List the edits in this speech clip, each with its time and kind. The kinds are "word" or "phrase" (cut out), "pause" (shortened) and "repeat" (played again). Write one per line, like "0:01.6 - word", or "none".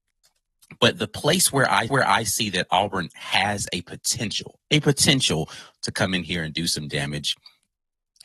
0:01.9 - repeat